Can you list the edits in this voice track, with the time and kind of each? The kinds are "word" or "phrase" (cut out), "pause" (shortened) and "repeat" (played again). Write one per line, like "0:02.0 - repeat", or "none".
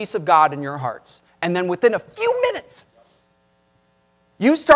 none